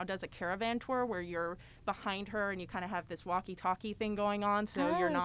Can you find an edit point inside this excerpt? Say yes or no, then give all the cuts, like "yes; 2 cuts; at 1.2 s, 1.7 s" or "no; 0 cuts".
no; 0 cuts